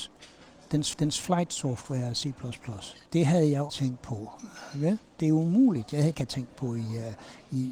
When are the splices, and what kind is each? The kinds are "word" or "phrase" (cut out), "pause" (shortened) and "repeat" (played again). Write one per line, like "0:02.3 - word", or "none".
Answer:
0:00.9 - repeat
0:03.1 - pause
0:03.7 - word
0:06.1 - phrase

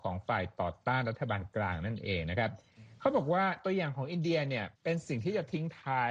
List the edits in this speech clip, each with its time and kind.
0:04.8 - pause

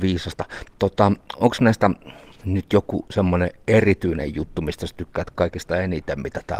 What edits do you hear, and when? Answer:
none

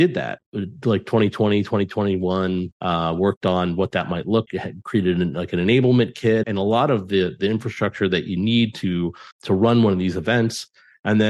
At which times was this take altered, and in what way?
0:04.5 - word
0:06.4 - word
0:09.3 - pause

